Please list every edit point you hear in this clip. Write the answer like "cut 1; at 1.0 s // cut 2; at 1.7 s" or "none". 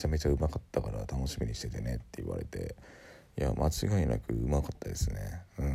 none